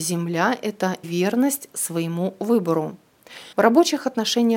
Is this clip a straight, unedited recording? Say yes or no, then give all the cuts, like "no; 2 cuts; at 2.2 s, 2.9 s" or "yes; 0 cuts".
no; 2 cuts; at 1.0 s, 3.5 s